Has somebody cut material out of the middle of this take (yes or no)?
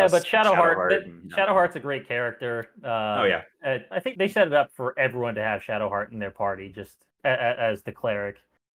no